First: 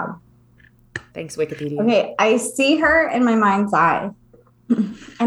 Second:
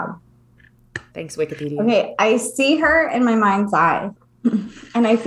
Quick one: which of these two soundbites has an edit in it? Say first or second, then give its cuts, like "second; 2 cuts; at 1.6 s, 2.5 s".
second; 1 cut; at 4.2 s